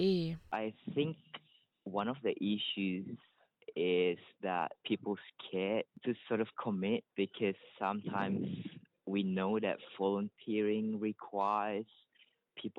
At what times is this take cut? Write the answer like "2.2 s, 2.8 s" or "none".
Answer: 4.8 s, 7.1 s